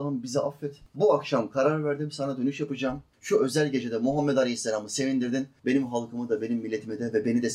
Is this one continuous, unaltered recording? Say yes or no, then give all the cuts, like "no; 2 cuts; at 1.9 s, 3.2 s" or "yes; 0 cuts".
yes; 0 cuts